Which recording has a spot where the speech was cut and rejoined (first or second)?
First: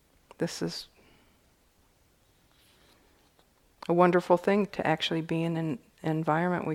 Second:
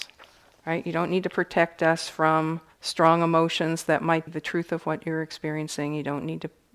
second